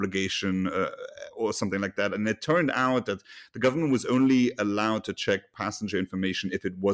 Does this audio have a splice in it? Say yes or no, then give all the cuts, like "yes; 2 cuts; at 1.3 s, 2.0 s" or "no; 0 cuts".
no; 0 cuts